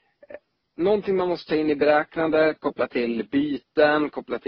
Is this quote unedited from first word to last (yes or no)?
yes